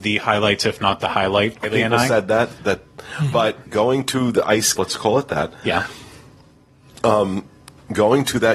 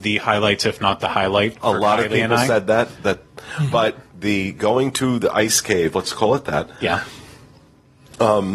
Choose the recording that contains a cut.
first; 3 cuts; at 1.6 s, 3.7 s, 4.8 s

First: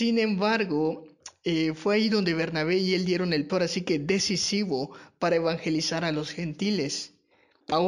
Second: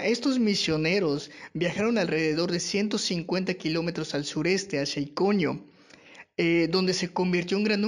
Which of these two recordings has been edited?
first; 1 cut; at 3.5 s

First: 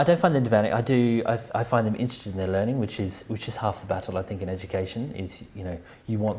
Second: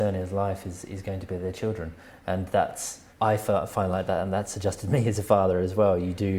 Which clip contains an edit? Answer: second; 1 cut; at 3.1 s

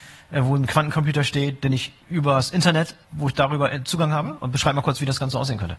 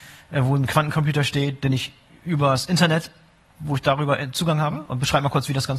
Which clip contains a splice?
first; 2 cuts; at 2.0 s, 3.0 s

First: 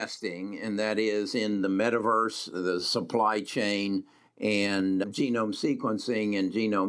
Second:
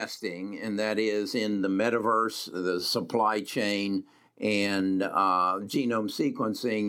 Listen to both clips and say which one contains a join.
first; 1 cut; at 5.0 s

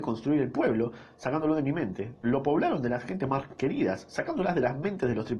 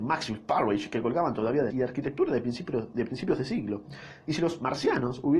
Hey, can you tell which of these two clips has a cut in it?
second; 1 cut; at 1.7 s

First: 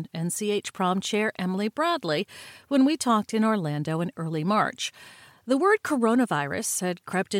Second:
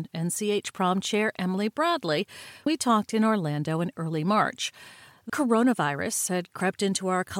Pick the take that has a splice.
second; 2 cuts; at 2.7 s, 5.3 s

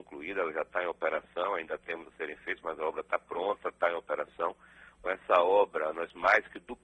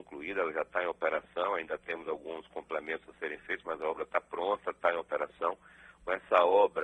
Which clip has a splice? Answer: first; 1 cut; at 2.0 s

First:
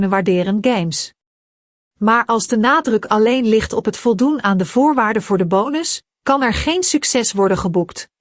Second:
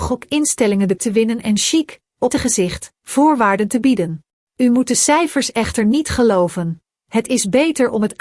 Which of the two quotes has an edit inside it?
second; 3 cuts; at 1.0 s, 2.3 s, 4.3 s

